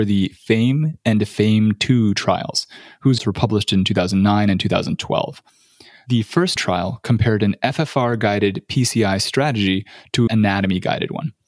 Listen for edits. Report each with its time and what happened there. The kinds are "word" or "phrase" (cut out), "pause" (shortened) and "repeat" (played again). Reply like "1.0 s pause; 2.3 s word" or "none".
3.2 s word; 6.6 s word; 10.3 s word